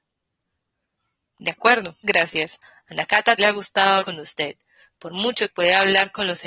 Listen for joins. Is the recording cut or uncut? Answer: cut